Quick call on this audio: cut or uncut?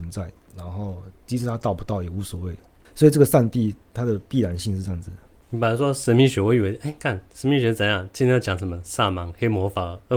uncut